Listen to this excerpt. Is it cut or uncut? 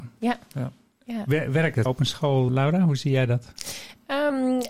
cut